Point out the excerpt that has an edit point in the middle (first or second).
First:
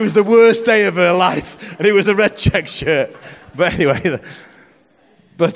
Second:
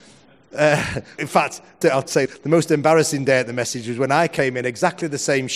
second